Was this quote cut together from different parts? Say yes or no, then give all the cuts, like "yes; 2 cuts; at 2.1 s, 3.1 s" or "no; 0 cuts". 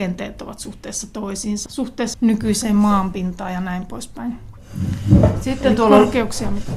yes; 2 cuts; at 1.7 s, 2.1 s